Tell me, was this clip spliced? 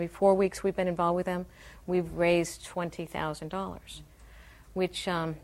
no; 0 cuts

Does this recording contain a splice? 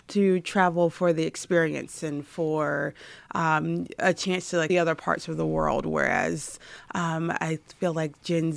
yes; 1 cut; at 4.7 s

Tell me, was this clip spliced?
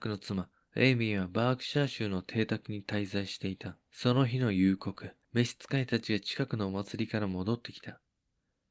yes; 2 cuts; at 3.8 s, 5.2 s

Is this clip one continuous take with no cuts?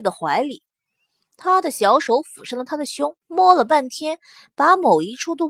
no; 1 cut; at 3.2 s

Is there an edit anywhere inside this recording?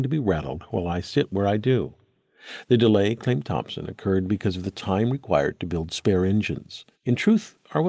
yes; 1 cut; at 6.9 s

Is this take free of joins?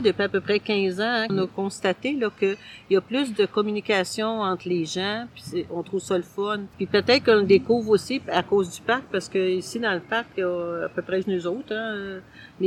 no; 3 cuts; at 1.3 s, 6.7 s, 11.2 s

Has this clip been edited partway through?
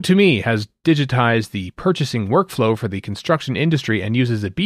no; 0 cuts

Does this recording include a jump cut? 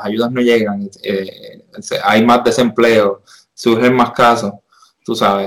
no; 0 cuts

